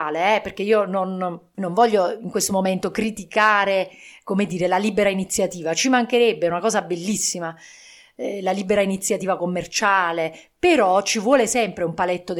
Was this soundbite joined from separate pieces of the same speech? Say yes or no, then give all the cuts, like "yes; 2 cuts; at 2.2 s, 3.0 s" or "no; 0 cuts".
no; 0 cuts